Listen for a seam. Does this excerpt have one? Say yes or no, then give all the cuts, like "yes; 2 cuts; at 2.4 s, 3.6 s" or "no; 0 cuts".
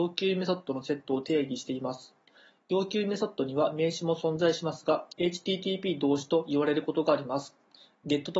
yes; 1 cut; at 5.1 s